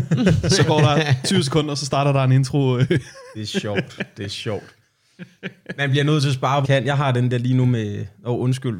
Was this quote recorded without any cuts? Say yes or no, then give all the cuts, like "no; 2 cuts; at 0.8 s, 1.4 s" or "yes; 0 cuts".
no; 1 cut; at 6.6 s